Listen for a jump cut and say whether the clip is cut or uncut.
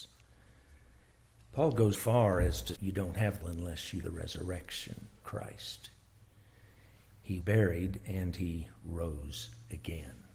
cut